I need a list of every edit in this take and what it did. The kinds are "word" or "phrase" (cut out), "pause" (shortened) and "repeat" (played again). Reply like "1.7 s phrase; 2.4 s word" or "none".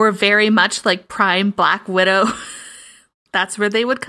3.2 s word